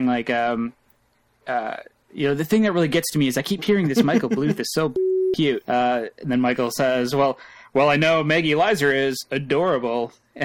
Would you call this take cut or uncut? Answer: uncut